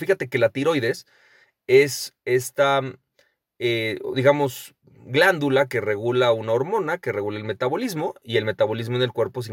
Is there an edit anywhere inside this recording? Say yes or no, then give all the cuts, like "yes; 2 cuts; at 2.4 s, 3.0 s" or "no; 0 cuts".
no; 0 cuts